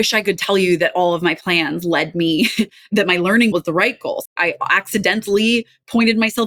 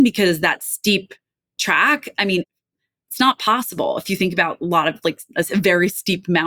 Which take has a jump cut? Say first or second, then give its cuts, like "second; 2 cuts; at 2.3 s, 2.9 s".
first; 2 cuts; at 3.5 s, 4.3 s